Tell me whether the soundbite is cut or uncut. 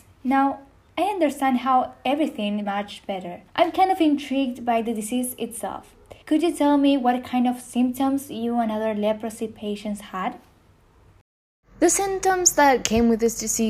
cut